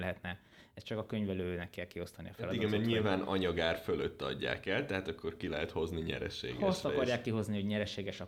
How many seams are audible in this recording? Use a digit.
0